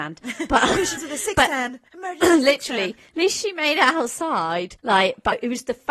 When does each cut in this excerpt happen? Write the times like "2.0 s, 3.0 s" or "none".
1.0 s, 1.9 s, 4.8 s